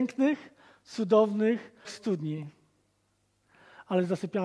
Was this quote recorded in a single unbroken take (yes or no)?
no